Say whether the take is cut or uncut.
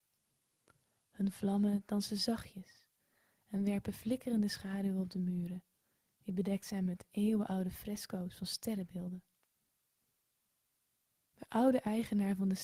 uncut